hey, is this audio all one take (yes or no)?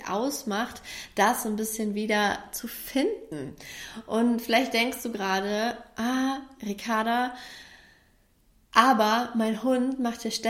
yes